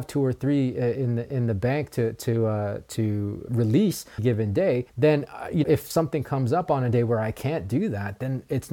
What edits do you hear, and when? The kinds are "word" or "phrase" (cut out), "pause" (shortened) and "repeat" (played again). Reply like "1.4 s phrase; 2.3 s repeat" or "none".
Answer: 3.5 s word; 4.2 s phrase; 4.9 s pause; 5.6 s word